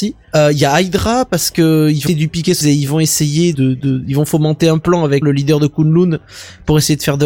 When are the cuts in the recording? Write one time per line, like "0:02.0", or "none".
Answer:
0:02.1
0:02.6
0:03.5
0:05.2